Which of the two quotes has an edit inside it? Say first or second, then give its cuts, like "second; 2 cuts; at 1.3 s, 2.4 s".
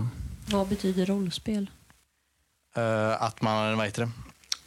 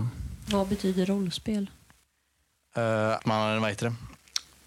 second; 1 cut; at 3.2 s